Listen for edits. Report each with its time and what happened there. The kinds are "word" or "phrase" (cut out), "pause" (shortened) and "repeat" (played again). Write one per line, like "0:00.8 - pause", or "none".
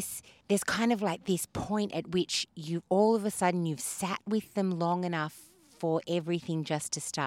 none